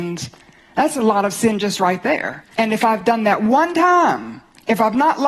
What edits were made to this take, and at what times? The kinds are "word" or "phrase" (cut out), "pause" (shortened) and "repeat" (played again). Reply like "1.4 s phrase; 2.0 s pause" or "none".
2.5 s pause